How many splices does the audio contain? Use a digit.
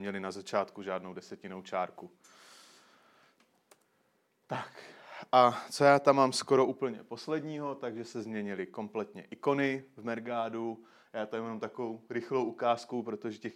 0